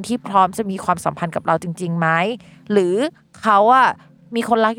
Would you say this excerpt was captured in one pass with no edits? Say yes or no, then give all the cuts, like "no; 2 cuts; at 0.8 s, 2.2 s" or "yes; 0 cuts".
yes; 0 cuts